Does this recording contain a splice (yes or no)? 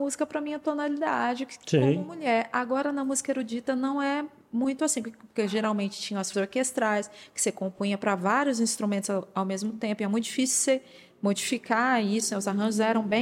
yes